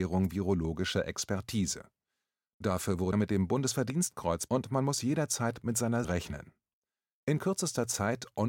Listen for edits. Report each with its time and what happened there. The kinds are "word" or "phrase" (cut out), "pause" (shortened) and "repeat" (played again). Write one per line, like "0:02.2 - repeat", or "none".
0:03.1 - word
0:04.5 - word
0:06.0 - word